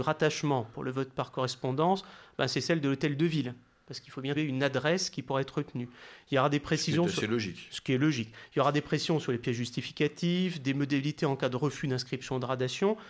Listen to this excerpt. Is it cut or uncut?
cut